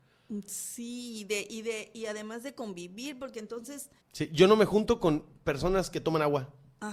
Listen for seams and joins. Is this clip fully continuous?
no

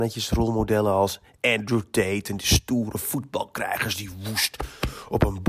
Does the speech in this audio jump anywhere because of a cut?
no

